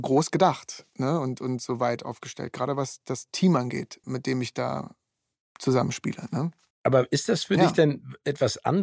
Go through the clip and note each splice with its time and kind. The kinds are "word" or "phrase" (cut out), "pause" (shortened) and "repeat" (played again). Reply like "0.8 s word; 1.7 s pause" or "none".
4.0 s word; 6.7 s pause